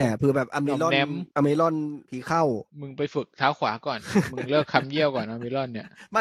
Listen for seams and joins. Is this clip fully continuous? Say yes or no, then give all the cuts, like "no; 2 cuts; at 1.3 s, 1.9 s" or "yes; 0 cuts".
no; 3 cuts; at 1.3 s, 2.0 s, 2.7 s